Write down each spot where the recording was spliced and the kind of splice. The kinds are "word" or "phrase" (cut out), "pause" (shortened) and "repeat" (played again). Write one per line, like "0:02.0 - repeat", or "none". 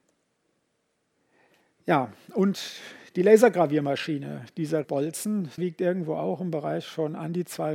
0:04.8 - word
0:05.6 - word

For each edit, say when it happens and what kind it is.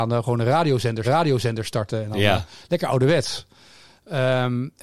0:01.0 - repeat

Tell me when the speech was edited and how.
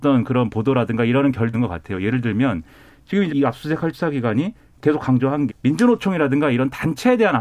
0:01.5 - word
0:03.3 - word
0:03.9 - word
0:05.5 - word

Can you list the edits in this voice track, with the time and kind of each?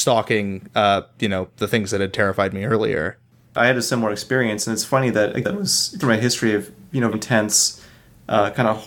0:05.4 - word
0:06.0 - word
0:07.1 - word

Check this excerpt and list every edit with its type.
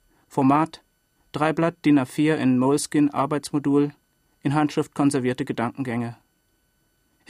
none

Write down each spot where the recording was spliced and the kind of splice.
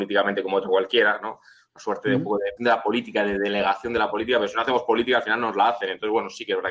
0:02.6 - word

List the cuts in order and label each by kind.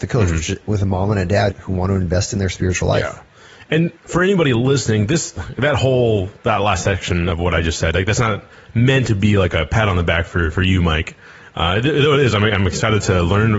0:01.5 - word
0:04.0 - pause
0:06.4 - pause

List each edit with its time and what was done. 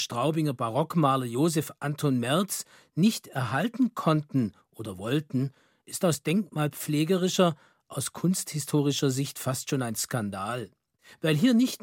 none

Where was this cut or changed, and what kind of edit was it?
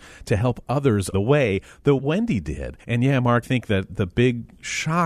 0:01.1 - word
0:02.0 - phrase
0:02.8 - pause
0:03.4 - word
0:03.9 - word

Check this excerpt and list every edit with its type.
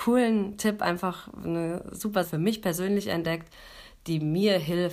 0:02.2 - word

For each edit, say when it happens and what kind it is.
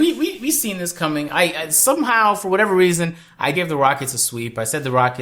0:03.5 - word

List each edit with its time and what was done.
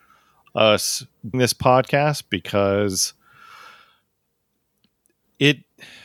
0:01.3 - word

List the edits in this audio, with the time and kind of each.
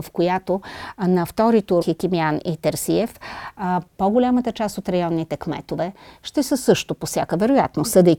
0:01.8 - phrase

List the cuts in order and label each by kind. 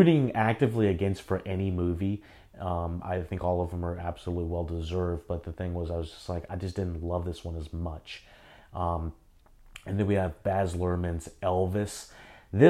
none

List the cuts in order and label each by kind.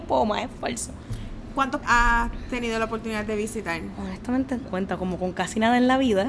0:01.8 - word
0:04.6 - phrase

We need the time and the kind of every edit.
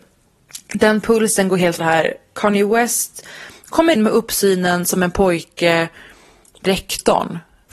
0:01.8 - word
0:04.0 - word
0:06.7 - phrase

